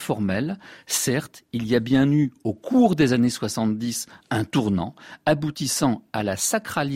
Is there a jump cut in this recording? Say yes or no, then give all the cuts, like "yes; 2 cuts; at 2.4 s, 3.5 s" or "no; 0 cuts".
no; 0 cuts